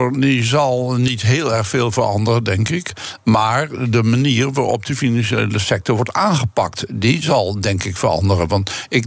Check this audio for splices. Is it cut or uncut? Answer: uncut